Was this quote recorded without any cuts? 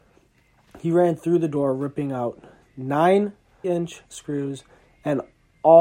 no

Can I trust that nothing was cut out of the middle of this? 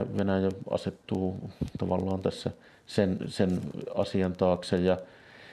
yes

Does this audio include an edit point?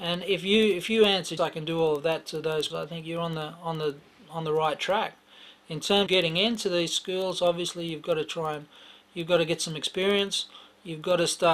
yes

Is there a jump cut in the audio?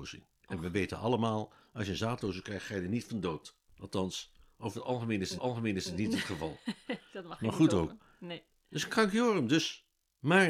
yes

